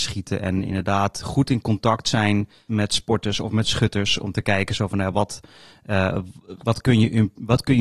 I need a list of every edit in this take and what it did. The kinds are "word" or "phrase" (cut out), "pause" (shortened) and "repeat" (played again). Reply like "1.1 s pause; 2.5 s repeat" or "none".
2.7 s word; 6.6 s word